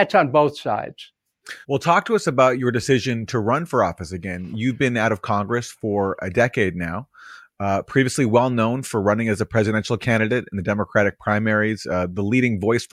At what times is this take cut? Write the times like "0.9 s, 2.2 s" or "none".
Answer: 1.6 s